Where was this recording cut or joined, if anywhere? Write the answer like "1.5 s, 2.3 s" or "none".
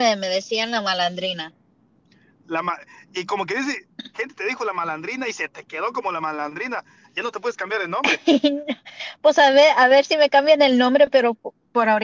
4.1 s